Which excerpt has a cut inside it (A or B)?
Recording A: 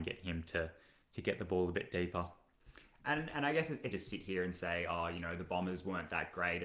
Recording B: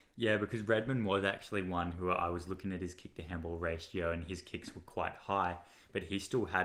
A